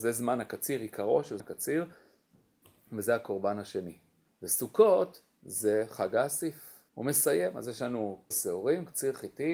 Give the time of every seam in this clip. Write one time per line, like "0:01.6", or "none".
0:01.4
0:04.3
0:06.9
0:08.3